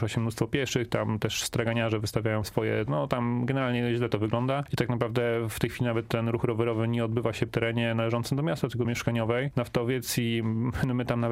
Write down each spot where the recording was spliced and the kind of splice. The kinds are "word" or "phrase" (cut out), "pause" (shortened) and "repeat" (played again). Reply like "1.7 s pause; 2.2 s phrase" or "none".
2.9 s word; 7.5 s word; 8.8 s phrase